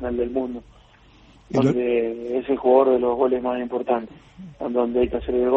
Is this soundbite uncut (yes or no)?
no